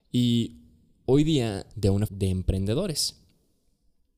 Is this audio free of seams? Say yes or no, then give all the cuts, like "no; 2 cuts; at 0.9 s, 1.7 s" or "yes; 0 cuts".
no; 2 cuts; at 1.7 s, 2.1 s